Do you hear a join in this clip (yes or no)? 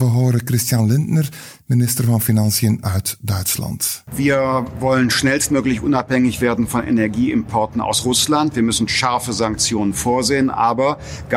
no